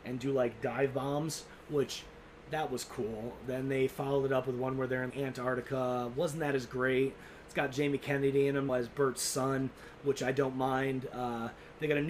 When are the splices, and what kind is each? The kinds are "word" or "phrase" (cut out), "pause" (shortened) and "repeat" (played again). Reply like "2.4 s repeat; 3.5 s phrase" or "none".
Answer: 5.1 s word; 8.7 s word